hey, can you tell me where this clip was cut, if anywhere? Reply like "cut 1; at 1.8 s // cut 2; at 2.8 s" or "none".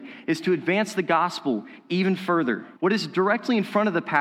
cut 1; at 2.8 s